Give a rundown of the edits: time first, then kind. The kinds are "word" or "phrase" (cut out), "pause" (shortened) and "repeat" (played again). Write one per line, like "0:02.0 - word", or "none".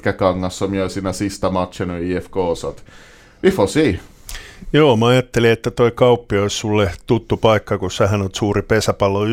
none

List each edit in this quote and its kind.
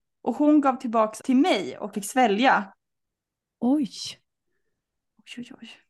0:01.2 - word
0:01.9 - word

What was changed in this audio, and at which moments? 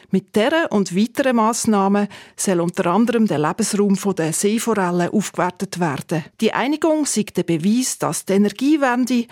0:06.3 - pause

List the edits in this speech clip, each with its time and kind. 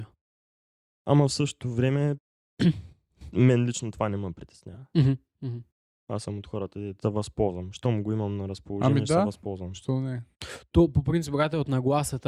0:07.0 - word

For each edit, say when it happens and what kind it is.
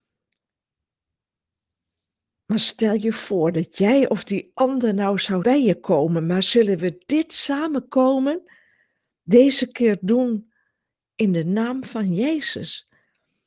0:05.4 - phrase

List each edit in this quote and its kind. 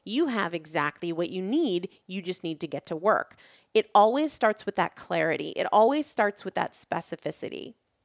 none

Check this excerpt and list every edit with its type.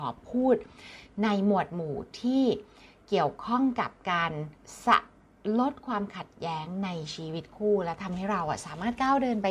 none

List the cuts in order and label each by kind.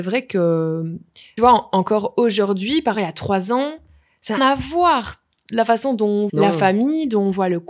0:01.4 - word
0:02.9 - word
0:04.4 - word
0:06.3 - word

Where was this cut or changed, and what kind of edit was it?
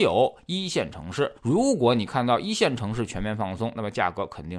0:01.4 - pause

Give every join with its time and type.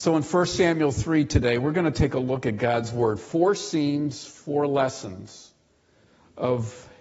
none

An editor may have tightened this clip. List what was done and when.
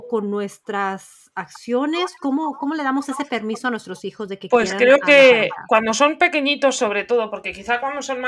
none

